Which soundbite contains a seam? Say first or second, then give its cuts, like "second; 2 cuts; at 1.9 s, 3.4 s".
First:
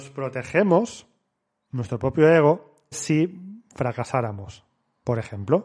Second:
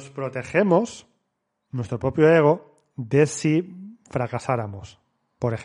first; 1 cut; at 2.9 s